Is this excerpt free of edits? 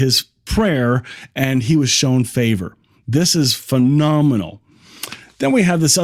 yes; 0 cuts

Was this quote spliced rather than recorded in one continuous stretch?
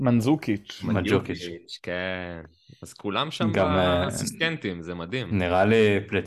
no; 0 cuts

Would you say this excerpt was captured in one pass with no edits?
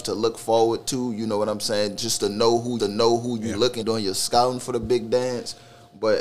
no; 2 cuts; at 2.8 s, 3.8 s

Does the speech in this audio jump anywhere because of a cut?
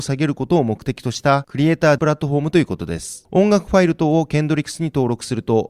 yes; 1 cut; at 2.0 s

